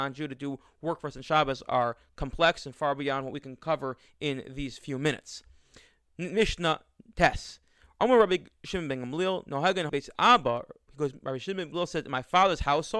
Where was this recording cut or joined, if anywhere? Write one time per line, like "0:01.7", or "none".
0:09.9
0:11.7